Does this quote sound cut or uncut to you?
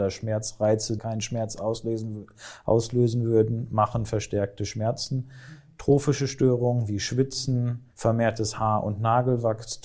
cut